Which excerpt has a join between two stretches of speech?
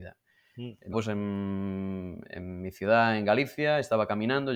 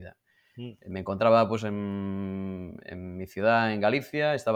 first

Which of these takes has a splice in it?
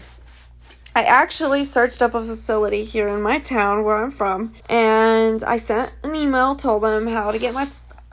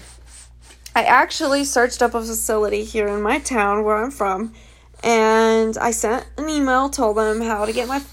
first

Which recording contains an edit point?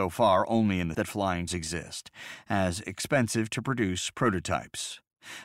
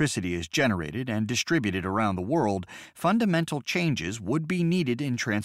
first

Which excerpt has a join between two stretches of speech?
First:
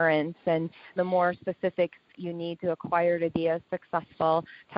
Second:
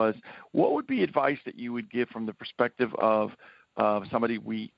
first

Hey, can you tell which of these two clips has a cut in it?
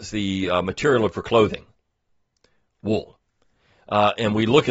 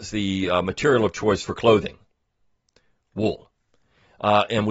first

